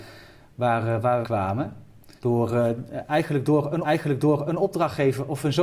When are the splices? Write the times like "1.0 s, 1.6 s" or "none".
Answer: 1.2 s, 2.2 s, 3.8 s